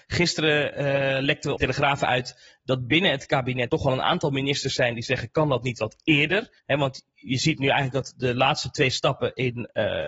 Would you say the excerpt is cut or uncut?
cut